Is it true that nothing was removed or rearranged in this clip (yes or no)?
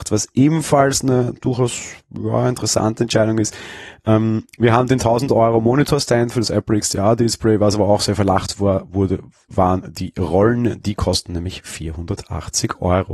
yes